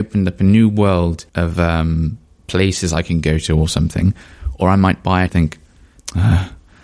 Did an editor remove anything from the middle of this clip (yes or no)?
yes